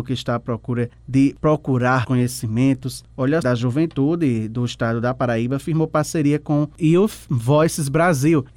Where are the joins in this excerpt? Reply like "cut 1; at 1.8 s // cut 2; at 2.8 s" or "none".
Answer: cut 1; at 2.0 s // cut 2; at 3.4 s